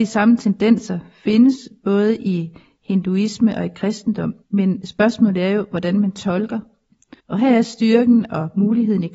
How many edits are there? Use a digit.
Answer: 2